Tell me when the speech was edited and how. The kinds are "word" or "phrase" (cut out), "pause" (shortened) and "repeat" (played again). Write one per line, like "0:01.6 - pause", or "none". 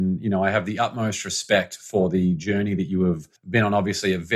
0:03.4 - pause

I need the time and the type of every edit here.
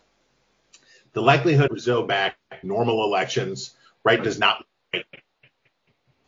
0:01.7 - word
0:02.1 - word
0:02.6 - word
0:04.2 - word

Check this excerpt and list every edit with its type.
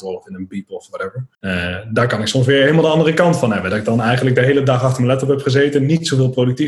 0:01.3 - pause

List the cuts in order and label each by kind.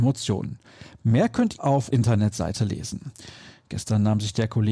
0:01.6 - word
0:01.9 - word

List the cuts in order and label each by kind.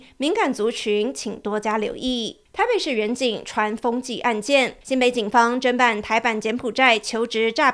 0:02.5 - pause
0:04.8 - pause

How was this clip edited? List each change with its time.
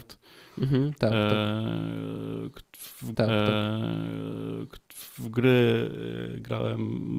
0:03.1 - repeat

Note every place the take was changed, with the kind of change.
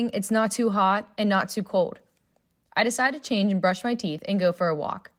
none

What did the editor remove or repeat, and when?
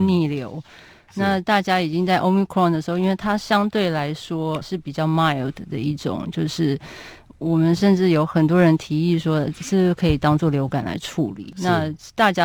0:04.6 - word

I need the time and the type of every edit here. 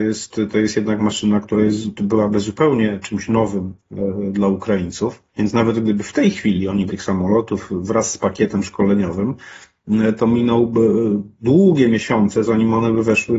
0:05.3 - pause
0:06.9 - phrase
0:12.5 - word

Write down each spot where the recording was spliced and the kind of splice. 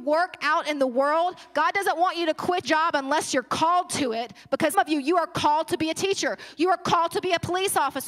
0:02.6 - word
0:04.7 - word

